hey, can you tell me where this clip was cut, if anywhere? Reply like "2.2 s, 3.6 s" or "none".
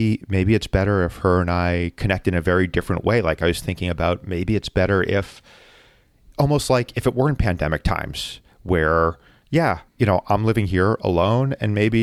9.9 s